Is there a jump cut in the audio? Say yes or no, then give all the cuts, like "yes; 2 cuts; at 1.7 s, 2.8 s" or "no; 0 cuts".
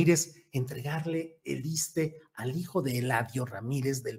no; 0 cuts